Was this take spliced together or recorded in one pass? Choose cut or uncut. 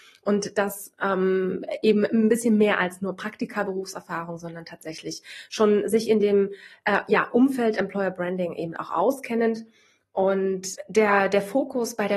uncut